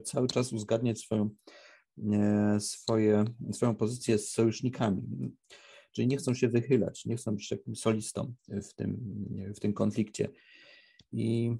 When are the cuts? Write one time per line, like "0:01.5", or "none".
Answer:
none